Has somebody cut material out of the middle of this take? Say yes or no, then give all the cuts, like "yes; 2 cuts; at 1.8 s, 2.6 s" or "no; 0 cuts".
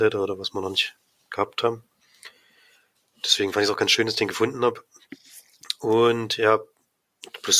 no; 0 cuts